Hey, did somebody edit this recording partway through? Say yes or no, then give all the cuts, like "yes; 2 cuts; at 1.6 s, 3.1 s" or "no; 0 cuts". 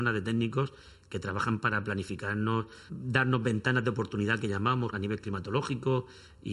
yes; 2 cuts; at 2.9 s, 4.9 s